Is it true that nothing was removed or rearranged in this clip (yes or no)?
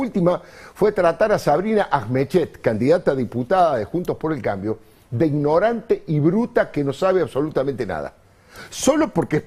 yes